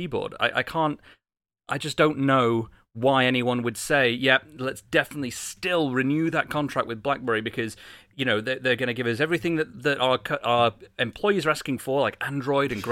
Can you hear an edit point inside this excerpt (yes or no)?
no